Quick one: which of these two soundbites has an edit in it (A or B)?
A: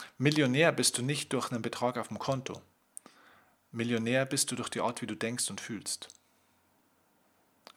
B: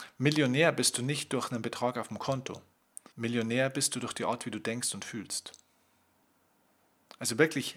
B